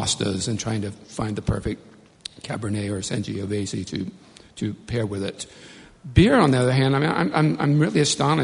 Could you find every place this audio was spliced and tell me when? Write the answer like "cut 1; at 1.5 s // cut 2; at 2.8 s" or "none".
none